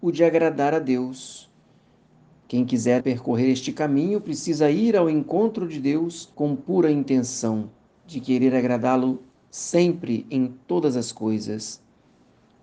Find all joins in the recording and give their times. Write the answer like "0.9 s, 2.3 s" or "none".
3.0 s, 6.3 s